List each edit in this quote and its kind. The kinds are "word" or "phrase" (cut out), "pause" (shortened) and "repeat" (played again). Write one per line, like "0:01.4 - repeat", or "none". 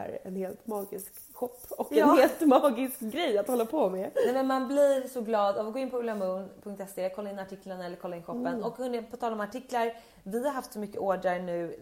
none